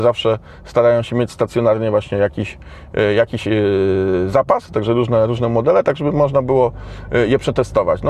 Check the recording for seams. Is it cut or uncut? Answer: uncut